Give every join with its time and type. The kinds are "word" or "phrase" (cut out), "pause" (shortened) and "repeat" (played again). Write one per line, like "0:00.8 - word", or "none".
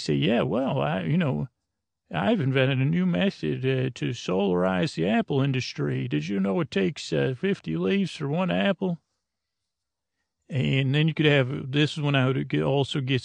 none